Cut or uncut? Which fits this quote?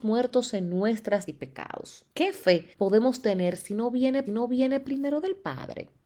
cut